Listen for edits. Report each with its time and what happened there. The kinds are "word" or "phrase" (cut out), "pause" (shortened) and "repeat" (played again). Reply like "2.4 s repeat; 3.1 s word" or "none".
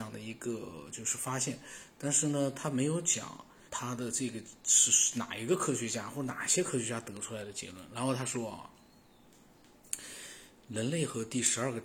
3.7 s phrase; 4.6 s pause